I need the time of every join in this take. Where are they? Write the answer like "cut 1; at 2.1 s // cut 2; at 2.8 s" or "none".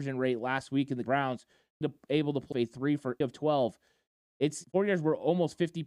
cut 1; at 1.0 s // cut 2; at 1.8 s // cut 3; at 2.5 s // cut 4; at 3.2 s // cut 5; at 4.6 s